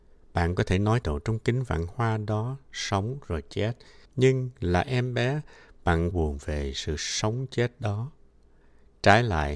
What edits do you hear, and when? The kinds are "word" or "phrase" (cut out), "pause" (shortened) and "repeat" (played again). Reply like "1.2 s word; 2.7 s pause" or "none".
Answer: 1.0 s phrase; 4.1 s pause; 6.1 s phrase

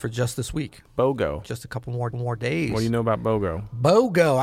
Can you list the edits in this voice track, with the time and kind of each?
2.1 s repeat

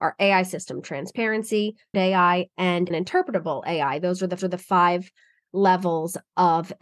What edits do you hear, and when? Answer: 1.9 s word; 2.9 s phrase; 4.4 s repeat

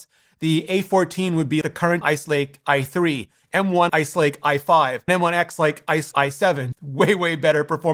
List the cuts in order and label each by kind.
1.6 s word; 2.0 s word; 3.9 s word; 5.1 s word; 6.1 s word; 6.7 s word

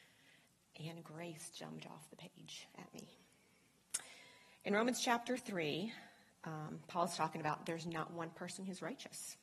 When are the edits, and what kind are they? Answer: none

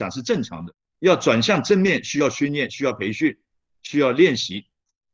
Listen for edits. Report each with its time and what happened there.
none

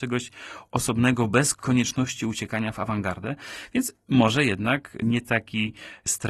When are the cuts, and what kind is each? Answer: none

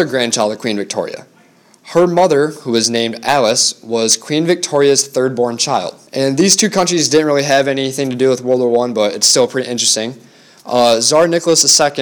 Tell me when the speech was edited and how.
6.1 s pause

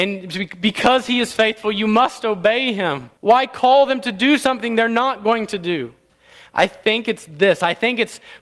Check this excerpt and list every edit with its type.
3.2 s pause; 6.1 s pause

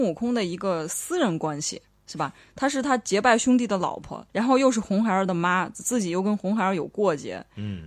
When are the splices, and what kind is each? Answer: 4.3 s pause

